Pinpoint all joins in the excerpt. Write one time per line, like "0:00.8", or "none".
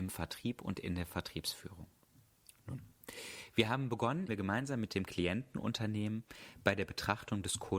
0:04.3